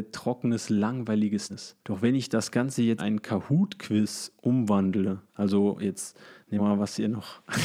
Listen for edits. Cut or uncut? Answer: cut